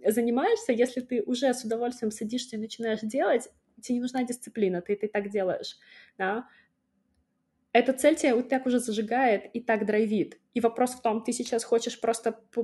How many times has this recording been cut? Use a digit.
0